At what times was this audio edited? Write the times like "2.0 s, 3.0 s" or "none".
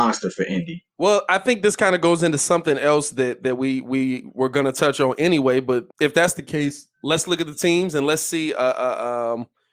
0.9 s, 5.9 s